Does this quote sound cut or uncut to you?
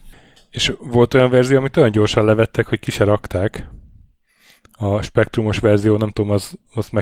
uncut